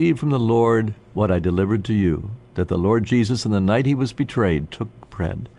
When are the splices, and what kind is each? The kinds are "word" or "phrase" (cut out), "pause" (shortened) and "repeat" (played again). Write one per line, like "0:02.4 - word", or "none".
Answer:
0:01.0 - pause